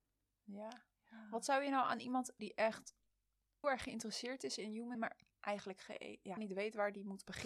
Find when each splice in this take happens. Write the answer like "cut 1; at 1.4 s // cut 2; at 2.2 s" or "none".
cut 1; at 2.4 s // cut 2; at 3.6 s // cut 3; at 4.9 s // cut 4; at 6.4 s